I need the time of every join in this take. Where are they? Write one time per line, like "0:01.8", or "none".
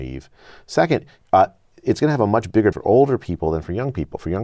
0:02.7